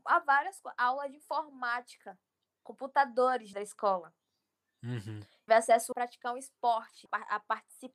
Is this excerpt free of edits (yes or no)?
no